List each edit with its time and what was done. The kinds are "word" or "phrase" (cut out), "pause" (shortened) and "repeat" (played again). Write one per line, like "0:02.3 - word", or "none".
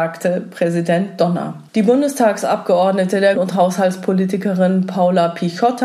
0:01.7 - pause
0:03.3 - word